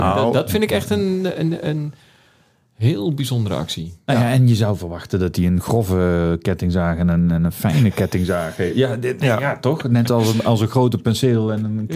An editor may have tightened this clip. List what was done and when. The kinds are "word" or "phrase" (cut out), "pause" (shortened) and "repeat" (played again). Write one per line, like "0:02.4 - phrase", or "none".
none

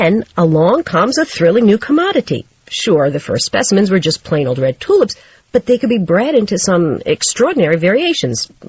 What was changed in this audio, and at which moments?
none

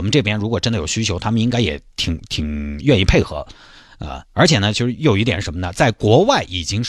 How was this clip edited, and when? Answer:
0:04.3 - pause

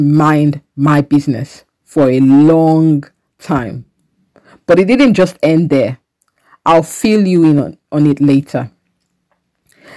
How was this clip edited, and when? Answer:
none

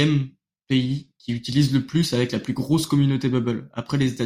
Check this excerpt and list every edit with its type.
0:01.2 - pause

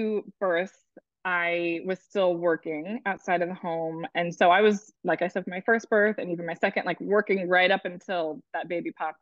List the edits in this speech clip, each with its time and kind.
0:05.0 - pause

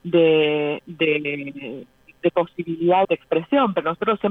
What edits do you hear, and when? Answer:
0:03.0 - word

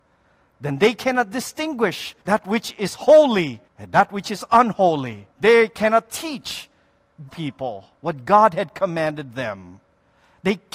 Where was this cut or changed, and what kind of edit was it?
0:02.2 - pause
0:03.7 - pause
0:05.3 - pause
0:07.3 - word

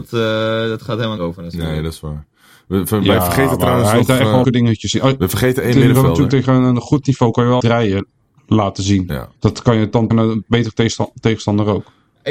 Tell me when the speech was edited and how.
0:01.2 - phrase
0:04.4 - word
0:07.6 - phrase
0:09.4 - pause
0:10.1 - word

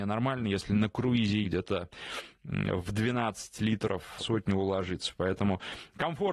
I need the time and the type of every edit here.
0:01.4 - phrase
0:04.2 - word

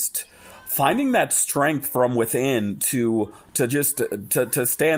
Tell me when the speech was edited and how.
none

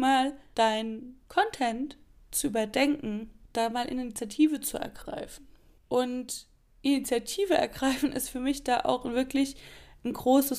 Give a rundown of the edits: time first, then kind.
none

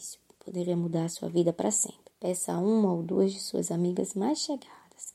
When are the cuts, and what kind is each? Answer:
0:02.1 - pause

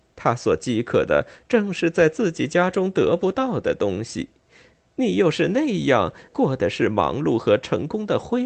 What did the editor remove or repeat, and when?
0:06.3 - word

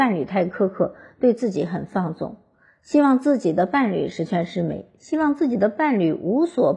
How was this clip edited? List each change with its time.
none

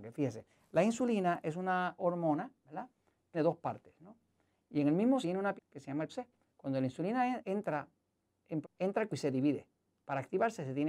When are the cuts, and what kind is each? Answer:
0:02.0 - word
0:03.3 - word
0:05.2 - word
0:05.6 - word
0:06.1 - word
0:07.4 - word
0:08.6 - word
0:09.1 - word

